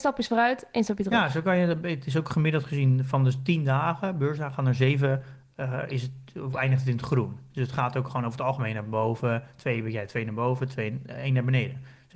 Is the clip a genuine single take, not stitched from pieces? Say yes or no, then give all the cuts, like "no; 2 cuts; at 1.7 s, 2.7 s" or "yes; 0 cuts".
yes; 0 cuts